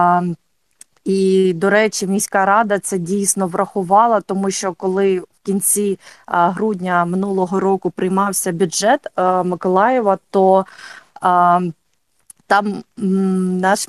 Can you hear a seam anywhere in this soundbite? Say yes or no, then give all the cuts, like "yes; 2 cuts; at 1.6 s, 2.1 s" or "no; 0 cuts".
no; 0 cuts